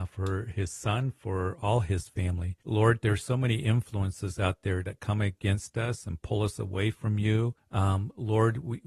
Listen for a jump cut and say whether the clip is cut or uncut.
cut